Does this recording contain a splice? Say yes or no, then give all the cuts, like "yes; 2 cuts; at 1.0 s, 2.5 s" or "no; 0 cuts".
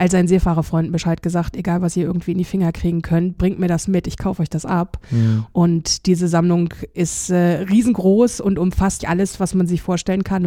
yes; 1 cut; at 9.0 s